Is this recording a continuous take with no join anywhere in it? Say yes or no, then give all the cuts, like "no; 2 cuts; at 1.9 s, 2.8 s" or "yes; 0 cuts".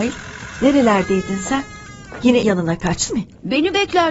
no; 2 cuts; at 2.4 s, 3.1 s